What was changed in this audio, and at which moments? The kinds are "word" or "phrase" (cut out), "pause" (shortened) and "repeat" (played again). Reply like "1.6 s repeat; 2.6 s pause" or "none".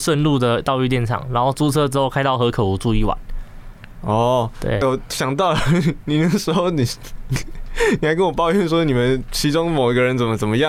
4.8 s phrase